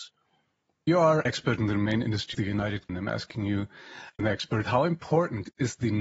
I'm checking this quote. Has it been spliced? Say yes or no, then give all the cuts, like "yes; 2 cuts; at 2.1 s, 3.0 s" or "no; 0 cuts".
yes; 4 cuts; at 1.3 s, 2.3 s, 2.9 s, 4.2 s